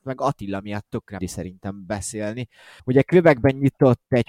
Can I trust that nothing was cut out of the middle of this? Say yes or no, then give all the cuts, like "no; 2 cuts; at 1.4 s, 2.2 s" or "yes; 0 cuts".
no; 2 cuts; at 1.2 s, 2.8 s